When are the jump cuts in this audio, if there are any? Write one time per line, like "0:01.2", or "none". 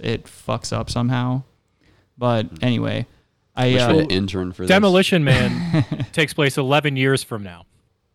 0:03.9